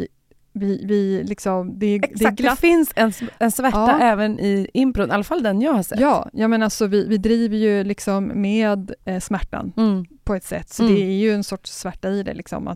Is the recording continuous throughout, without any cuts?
yes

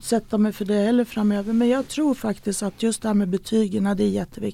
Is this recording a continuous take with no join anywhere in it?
yes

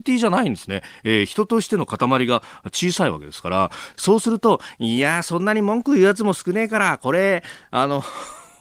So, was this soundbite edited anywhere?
yes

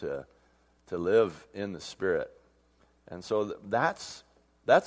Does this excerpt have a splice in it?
no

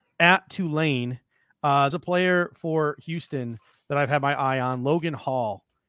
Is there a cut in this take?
yes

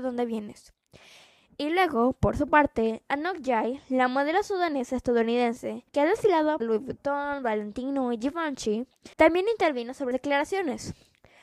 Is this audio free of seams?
no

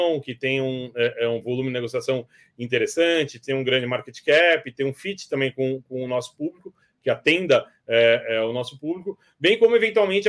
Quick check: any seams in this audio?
no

